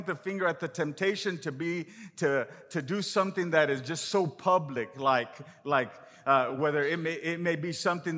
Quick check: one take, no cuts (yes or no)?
yes